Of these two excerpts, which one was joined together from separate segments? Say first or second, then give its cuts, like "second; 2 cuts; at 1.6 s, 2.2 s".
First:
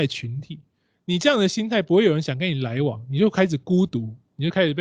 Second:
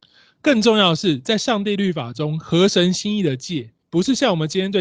second; 1 cut; at 3.8 s